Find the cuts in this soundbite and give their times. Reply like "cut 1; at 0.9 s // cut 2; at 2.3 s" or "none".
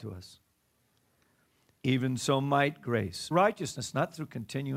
cut 1; at 3.3 s